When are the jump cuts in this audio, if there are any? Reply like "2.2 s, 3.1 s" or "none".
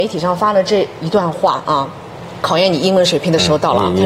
2.4 s

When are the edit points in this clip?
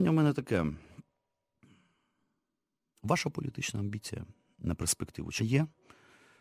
5.4 s

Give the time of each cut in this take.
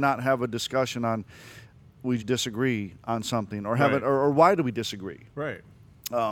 2.2 s

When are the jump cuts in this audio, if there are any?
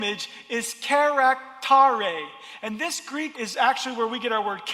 3.3 s

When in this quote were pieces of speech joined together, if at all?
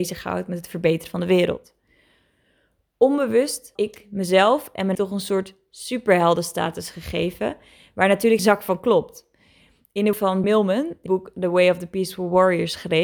3.8 s, 4.9 s, 8.4 s, 10.1 s, 10.4 s, 11.1 s

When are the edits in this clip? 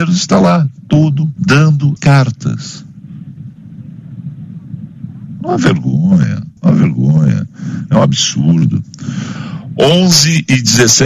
1.4 s, 2.0 s, 6.6 s

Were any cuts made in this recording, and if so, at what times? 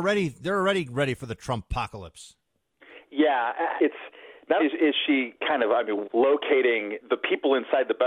3.8 s, 4.6 s, 6.0 s, 7.0 s

